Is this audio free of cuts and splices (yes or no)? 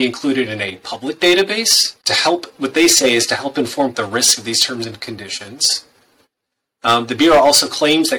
no